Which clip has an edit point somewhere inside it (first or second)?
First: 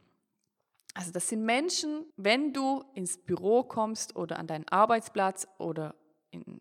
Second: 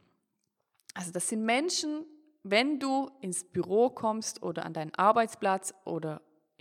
first